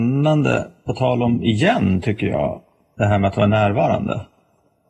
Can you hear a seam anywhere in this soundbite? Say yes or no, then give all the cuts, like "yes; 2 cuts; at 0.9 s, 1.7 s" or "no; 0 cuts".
no; 0 cuts